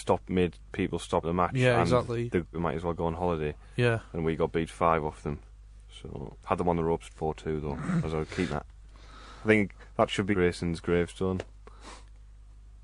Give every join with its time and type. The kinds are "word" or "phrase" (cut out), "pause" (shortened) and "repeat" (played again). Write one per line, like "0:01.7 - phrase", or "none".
0:01.2 - word
0:02.5 - word
0:06.4 - pause
0:08.5 - word
0:10.3 - phrase